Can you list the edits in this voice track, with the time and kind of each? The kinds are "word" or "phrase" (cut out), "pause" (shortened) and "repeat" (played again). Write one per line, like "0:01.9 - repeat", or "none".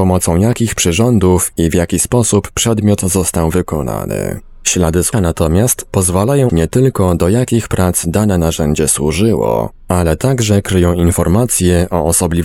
0:05.1 - word
0:06.5 - word